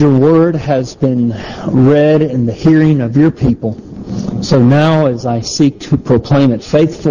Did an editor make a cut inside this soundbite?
no; 0 cuts

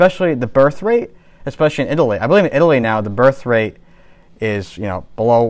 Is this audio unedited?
yes; 0 cuts

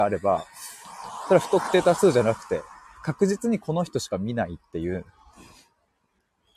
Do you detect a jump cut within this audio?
no; 0 cuts

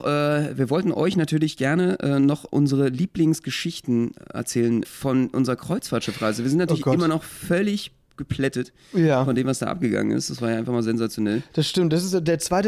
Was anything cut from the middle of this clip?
yes; 1 cut; at 4.8 s

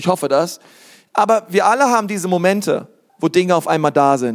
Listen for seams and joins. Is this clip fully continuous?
no; 1 cut; at 3.1 s

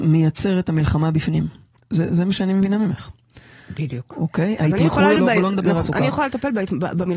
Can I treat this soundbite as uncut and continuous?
no; 3 cuts; at 2.1 s, 5.2 s, 5.8 s

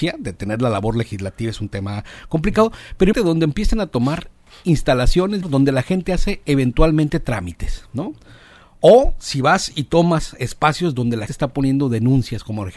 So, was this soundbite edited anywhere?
yes; 3 cuts; at 3.1 s, 5.4 s, 11.3 s

